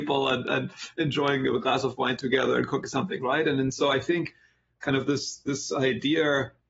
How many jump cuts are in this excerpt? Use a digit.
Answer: 0